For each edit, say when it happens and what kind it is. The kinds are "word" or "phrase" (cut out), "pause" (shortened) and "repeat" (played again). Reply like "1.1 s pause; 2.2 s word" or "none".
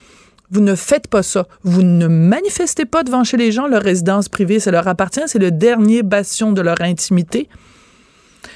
1.5 s pause